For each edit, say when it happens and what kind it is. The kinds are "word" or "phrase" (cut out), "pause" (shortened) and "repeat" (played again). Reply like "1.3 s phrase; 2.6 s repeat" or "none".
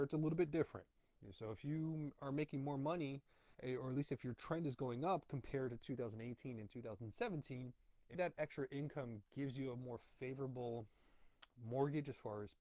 3.5 s pause; 8.1 s word